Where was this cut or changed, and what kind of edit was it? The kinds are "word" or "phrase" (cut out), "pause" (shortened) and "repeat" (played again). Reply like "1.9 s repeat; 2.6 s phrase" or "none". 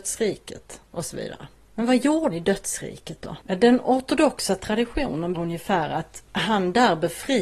2.3 s word; 3.4 s pause; 5.3 s word; 6.3 s pause